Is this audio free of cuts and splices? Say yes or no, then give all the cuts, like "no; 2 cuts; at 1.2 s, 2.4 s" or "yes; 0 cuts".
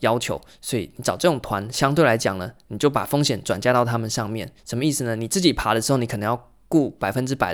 no; 1 cut; at 4.6 s